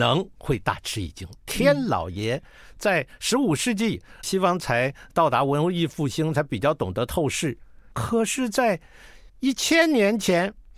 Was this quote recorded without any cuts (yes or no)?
no